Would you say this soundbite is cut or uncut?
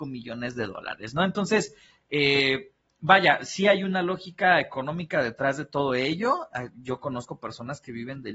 uncut